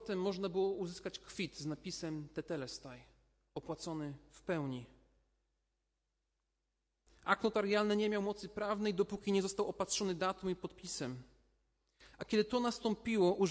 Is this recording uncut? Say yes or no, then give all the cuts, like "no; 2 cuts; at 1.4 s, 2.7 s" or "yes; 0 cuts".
yes; 0 cuts